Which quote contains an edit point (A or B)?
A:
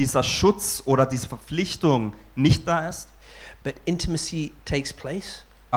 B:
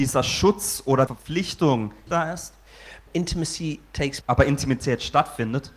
B